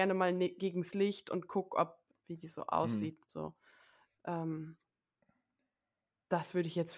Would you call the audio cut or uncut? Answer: cut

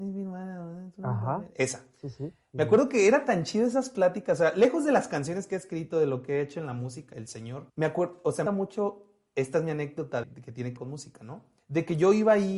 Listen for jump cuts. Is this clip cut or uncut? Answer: cut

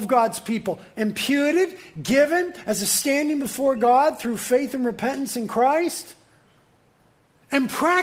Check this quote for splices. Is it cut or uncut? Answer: uncut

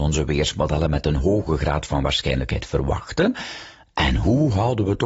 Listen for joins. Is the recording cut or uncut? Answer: uncut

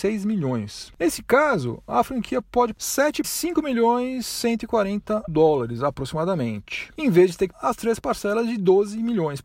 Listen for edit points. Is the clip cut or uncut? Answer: cut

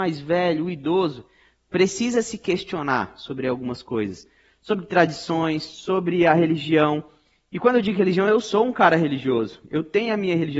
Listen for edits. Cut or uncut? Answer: uncut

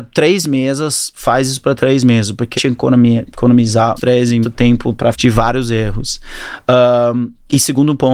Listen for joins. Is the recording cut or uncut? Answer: cut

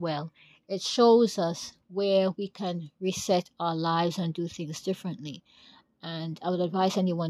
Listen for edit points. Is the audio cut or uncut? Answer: uncut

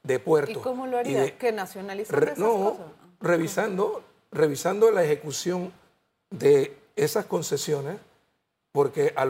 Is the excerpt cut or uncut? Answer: uncut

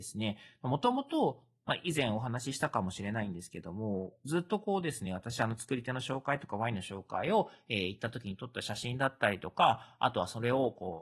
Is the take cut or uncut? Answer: uncut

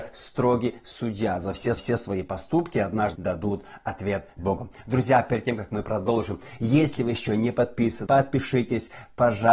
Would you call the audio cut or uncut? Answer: cut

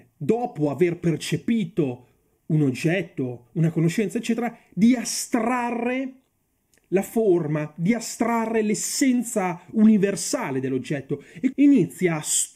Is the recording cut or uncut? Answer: cut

